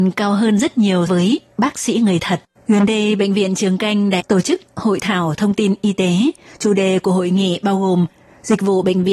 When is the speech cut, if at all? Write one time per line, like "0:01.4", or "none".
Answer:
0:01.1
0:02.5
0:04.2

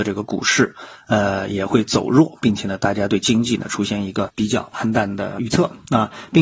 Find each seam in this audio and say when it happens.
none

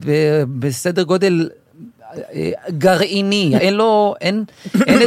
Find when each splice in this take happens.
0:03.6

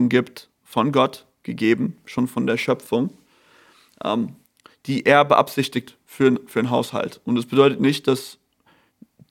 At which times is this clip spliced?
none

